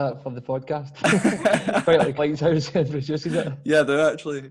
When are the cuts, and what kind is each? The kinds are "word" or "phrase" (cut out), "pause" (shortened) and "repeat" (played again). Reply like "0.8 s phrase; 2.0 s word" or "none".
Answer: 2.2 s word